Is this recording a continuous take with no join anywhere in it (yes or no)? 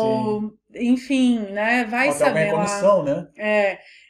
yes